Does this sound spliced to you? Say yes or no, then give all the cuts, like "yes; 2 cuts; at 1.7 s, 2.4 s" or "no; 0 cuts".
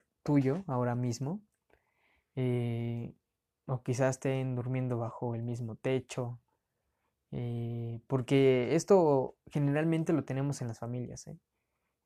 no; 0 cuts